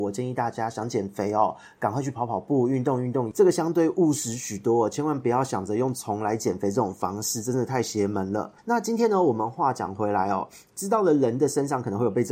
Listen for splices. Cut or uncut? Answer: cut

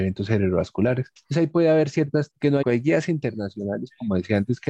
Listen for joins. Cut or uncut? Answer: cut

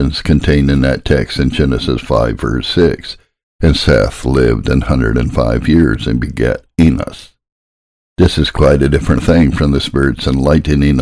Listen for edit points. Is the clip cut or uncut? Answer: uncut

